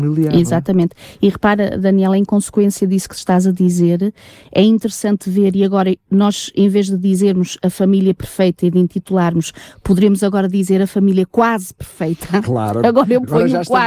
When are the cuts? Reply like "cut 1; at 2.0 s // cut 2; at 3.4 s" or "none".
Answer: none